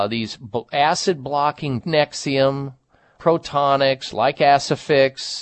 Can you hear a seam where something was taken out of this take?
yes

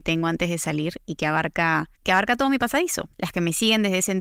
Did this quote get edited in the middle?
yes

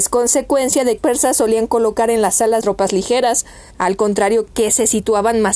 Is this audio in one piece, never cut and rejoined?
no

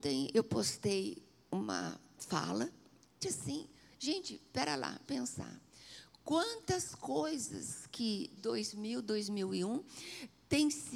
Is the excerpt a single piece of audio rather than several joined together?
no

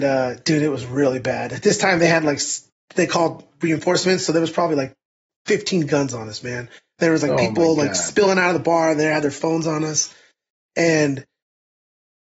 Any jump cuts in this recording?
no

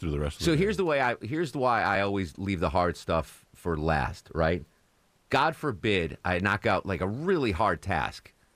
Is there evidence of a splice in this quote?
no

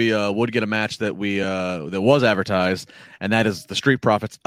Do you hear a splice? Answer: no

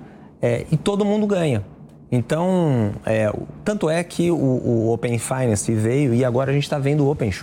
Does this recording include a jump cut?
no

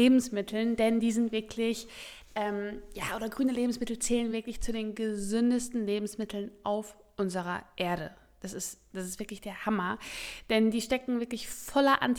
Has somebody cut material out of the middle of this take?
no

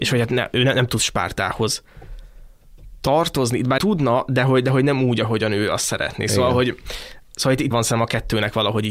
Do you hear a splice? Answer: yes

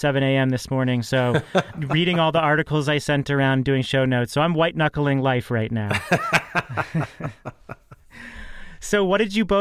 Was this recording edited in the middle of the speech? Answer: yes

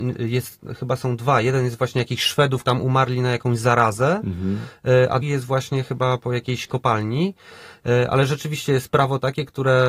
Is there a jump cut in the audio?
yes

